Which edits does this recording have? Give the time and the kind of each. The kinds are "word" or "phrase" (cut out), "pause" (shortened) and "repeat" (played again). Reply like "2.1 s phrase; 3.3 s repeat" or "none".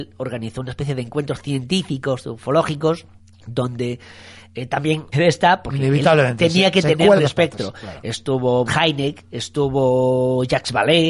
3.2 s pause; 5.1 s phrase; 7.2 s word; 8.7 s word